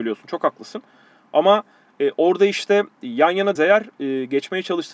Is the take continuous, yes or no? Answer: no